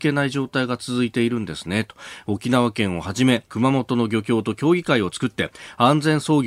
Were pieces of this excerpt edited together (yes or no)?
yes